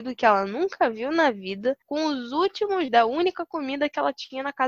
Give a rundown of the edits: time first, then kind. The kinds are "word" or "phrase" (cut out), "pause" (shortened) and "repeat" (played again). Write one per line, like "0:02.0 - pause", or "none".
0:01.8 - pause
0:02.9 - word